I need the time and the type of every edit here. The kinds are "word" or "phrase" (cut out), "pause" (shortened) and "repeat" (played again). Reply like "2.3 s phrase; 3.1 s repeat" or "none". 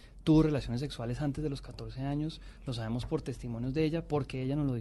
none